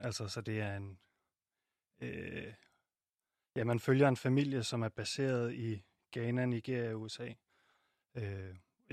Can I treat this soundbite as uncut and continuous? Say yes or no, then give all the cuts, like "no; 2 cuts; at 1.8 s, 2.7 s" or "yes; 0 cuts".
yes; 0 cuts